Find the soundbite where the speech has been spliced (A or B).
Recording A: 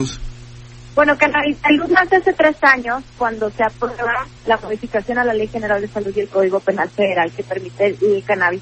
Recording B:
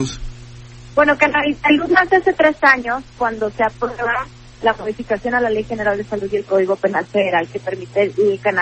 A